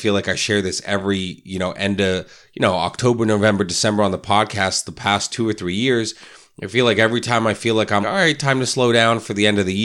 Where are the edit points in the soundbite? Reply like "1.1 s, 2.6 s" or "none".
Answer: 8.0 s

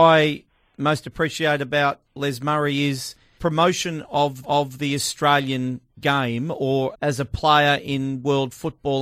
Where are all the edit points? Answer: 2.0 s, 3.4 s, 4.4 s, 5.9 s, 6.9 s

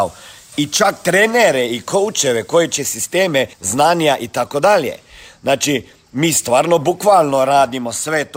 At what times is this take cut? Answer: 2.8 s, 3.5 s

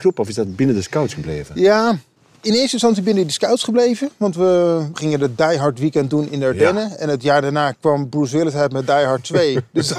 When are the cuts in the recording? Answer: none

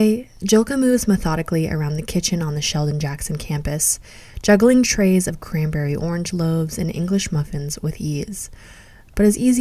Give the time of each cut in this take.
none

